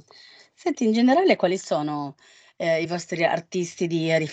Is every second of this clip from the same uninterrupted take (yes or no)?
yes